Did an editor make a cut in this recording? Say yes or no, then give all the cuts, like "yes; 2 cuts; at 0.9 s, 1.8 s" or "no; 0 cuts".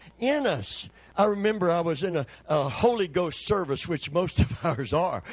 no; 0 cuts